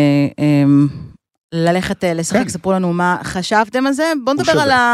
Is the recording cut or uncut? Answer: uncut